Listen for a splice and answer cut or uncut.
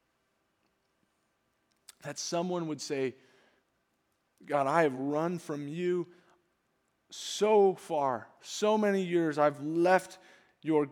uncut